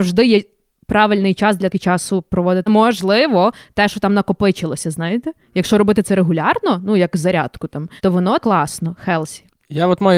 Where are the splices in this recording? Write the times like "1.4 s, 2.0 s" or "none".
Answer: 1.7 s, 2.7 s, 8.0 s, 8.4 s